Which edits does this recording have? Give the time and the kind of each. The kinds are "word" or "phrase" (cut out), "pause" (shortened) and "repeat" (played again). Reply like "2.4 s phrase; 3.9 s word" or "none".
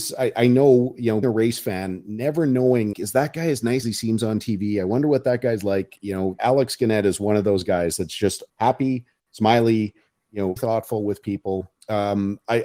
1.2 s word; 2.9 s word; 3.8 s word; 6.4 s word; 8.5 s word; 10.6 s word

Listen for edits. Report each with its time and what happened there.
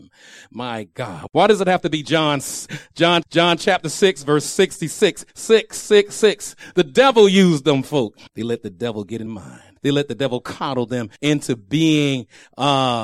3.2 s repeat; 5.3 s pause; 8.3 s pause; 9.3 s word; 9.8 s pause; 11.2 s pause

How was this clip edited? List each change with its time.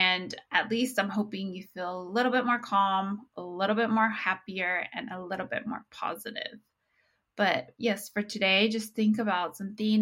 none

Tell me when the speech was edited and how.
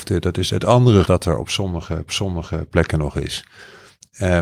1.0 s word; 2.1 s repeat

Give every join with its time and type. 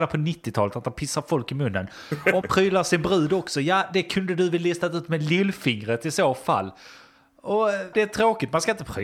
2.4 s word; 7.9 s word

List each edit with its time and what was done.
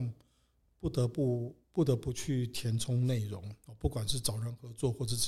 1.6 s pause

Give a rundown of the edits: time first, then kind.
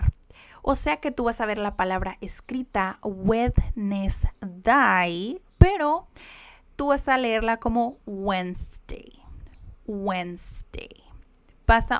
5.5 s pause

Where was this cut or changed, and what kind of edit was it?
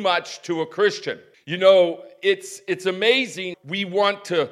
1.3 s pause; 3.5 s word

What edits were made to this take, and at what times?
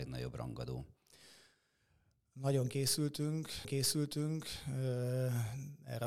3.6 s repeat

